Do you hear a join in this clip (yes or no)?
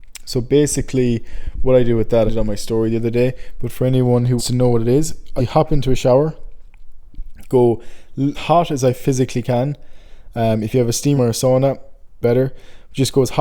yes